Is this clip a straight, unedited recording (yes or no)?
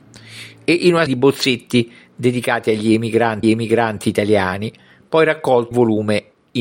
no